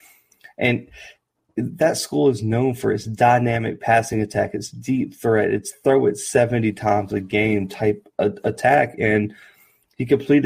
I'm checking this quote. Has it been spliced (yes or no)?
no